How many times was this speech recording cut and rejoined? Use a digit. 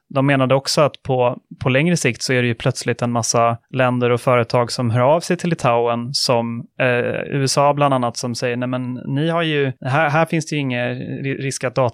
3